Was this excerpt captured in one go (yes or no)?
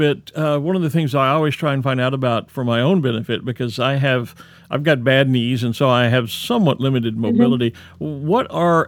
yes